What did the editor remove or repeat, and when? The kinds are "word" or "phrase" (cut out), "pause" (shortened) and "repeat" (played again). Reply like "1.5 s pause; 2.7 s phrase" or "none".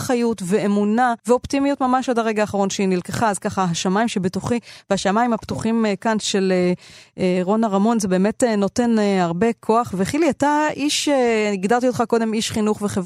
1.2 s pause